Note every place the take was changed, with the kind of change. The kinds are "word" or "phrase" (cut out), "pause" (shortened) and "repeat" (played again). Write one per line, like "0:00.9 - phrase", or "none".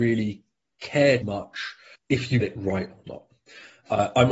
0:01.2 - word
0:01.9 - word
0:02.4 - word